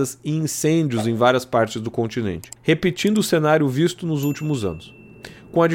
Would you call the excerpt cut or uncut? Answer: cut